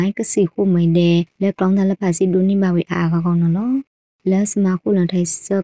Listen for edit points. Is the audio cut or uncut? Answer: uncut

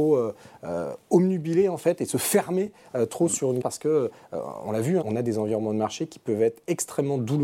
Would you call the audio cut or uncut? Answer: cut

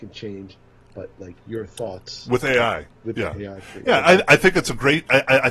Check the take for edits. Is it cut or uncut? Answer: cut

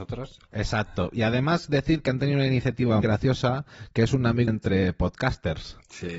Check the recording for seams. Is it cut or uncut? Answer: cut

